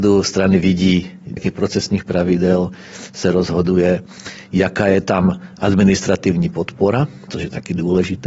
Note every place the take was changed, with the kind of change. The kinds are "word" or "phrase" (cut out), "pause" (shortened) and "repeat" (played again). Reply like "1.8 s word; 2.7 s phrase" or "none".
1.4 s phrase